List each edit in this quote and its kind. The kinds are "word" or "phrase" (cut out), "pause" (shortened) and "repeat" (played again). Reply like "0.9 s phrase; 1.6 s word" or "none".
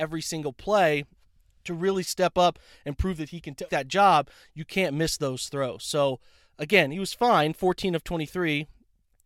3.7 s word